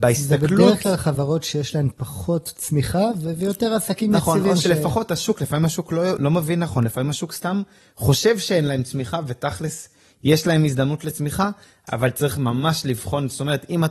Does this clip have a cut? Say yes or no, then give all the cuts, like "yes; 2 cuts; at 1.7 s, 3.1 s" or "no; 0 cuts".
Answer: no; 0 cuts